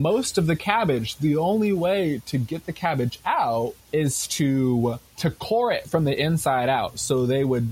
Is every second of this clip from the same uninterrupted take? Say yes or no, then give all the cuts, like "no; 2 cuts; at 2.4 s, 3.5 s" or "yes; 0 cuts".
no; 2 cuts; at 3.8 s, 5.1 s